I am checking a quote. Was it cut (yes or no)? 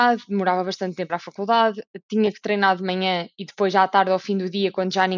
yes